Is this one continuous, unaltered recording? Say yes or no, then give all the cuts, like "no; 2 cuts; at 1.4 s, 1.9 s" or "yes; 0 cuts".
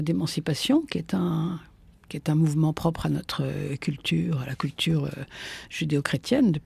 yes; 0 cuts